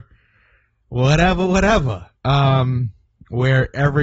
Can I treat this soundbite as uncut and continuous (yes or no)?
no